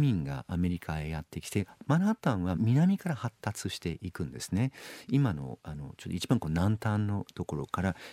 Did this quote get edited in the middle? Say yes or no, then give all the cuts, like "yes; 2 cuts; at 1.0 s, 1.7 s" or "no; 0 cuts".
yes; 1 cut; at 2.6 s